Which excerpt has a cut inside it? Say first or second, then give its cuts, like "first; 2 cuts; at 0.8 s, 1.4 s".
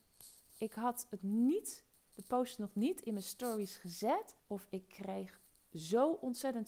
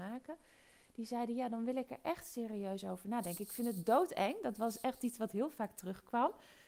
first; 2 cuts; at 1.2 s, 4.4 s